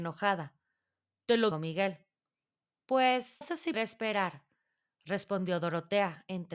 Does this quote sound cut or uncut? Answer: cut